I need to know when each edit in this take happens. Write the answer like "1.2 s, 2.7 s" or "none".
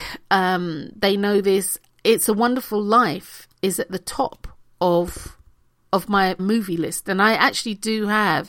6.4 s